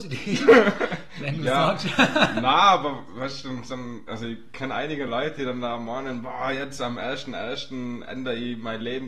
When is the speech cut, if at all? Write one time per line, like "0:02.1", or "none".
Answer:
none